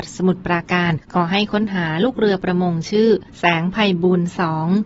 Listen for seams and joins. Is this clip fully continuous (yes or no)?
no